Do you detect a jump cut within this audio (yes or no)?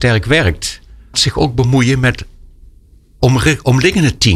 yes